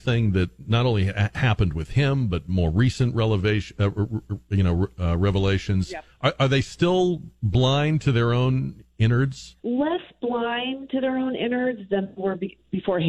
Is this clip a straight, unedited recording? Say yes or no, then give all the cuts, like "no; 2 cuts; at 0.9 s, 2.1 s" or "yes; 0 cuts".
no; 1 cut; at 9.6 s